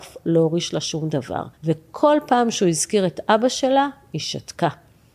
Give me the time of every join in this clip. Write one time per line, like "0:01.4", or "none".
0:01.5